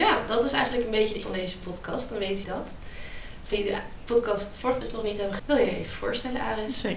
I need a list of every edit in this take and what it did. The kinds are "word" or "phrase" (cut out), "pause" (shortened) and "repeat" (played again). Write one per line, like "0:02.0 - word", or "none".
0:01.2 - word
0:02.4 - word
0:03.5 - word
0:04.8 - word
0:05.4 - word

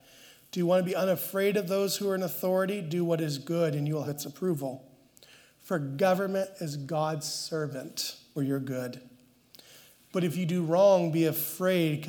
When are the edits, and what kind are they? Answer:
0:04.1 - word
0:08.4 - word

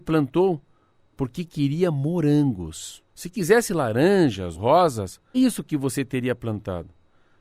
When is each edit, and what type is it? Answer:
0:03.1 - pause
0:04.5 - word
0:05.3 - word

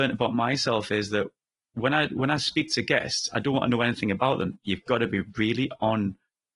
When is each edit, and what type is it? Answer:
none

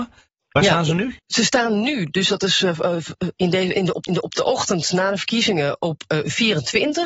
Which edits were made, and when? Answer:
0:01.2 - pause
0:04.1 - repeat

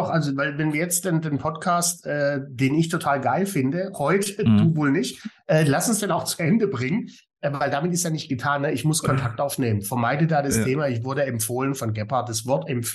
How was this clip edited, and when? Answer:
none

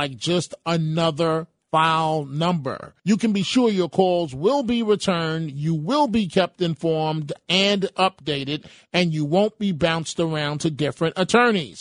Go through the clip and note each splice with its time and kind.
0:03.0 - pause

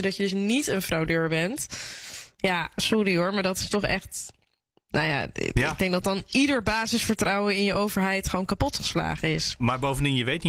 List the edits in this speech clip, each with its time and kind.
none

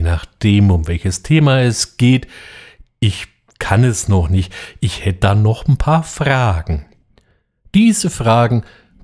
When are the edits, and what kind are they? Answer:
none

